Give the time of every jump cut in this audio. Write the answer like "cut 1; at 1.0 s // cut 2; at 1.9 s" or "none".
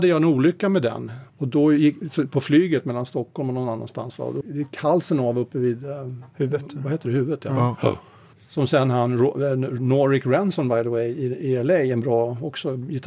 cut 1; at 1.3 s // cut 2; at 4.4 s // cut 3; at 8.3 s